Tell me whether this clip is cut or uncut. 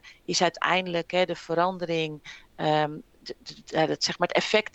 uncut